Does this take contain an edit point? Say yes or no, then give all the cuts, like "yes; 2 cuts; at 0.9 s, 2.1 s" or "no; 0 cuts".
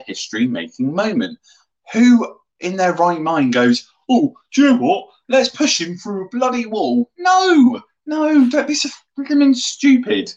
no; 0 cuts